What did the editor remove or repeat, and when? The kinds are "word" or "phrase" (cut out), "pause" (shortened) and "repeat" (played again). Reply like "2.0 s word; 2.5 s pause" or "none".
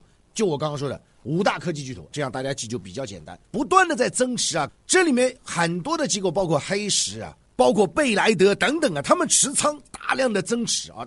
2.1 s phrase; 3.4 s pause; 4.7 s phrase; 7.5 s pause